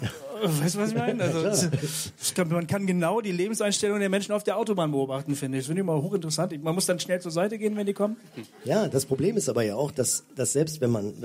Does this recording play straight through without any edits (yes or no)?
yes